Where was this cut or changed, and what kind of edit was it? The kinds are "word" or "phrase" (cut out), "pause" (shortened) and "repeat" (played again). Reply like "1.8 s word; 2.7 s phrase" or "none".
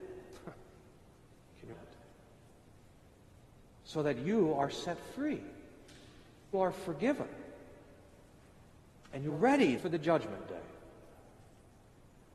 1.7 s word; 6.5 s word; 9.3 s word; 9.8 s word